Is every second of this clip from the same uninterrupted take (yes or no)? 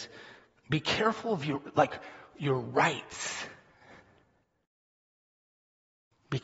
yes